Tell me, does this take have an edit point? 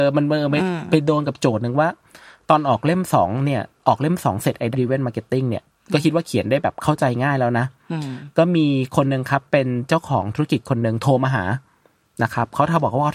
yes; 1 cut; at 4.7 s

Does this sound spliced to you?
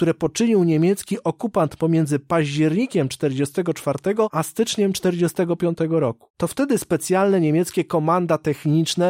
no; 0 cuts

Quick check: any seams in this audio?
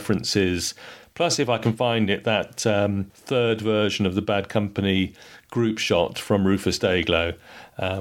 no; 0 cuts

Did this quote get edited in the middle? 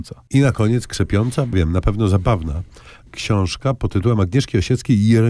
yes; 2 cuts; at 1.5 s, 3.1 s

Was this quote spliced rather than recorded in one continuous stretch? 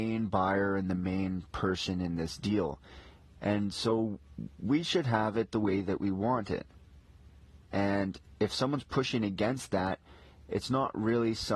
no; 0 cuts

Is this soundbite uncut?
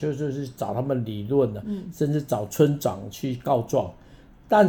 yes; 0 cuts

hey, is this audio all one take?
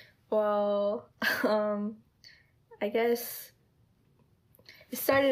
yes; 0 cuts

